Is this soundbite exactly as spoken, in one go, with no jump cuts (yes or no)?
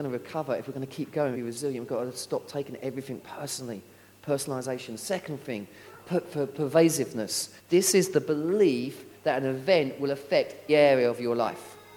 no